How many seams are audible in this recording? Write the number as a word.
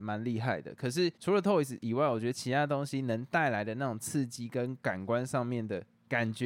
one